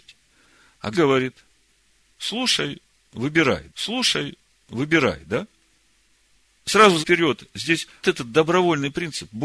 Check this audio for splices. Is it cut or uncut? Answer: cut